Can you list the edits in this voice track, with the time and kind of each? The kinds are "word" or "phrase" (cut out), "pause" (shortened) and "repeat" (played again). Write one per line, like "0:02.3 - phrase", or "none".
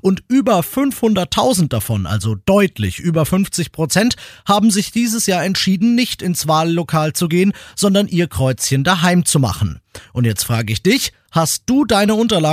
none